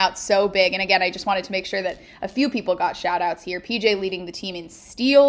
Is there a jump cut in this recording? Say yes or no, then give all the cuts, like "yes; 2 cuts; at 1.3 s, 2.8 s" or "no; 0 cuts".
no; 0 cuts